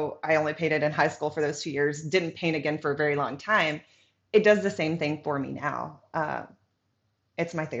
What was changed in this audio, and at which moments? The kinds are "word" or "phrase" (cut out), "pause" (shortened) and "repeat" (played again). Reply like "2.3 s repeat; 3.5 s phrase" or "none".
none